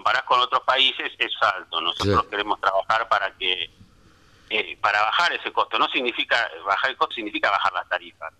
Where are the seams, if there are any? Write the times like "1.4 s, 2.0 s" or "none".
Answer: 1.4 s, 4.5 s, 7.1 s